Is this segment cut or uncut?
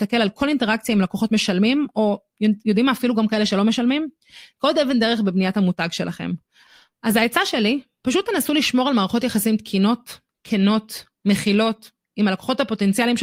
uncut